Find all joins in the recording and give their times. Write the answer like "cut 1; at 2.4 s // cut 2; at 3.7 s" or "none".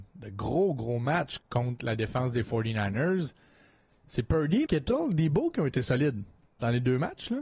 cut 1; at 1.4 s // cut 2; at 4.7 s